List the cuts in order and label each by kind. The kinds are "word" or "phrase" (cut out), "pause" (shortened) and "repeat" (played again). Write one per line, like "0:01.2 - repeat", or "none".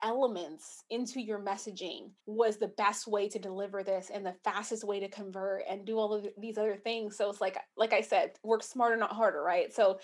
0:02.2 - pause